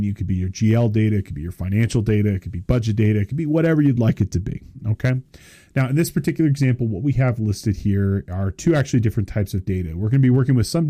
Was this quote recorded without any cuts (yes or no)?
yes